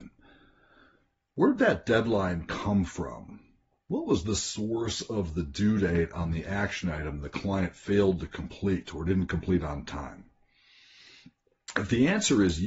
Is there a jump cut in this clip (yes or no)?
no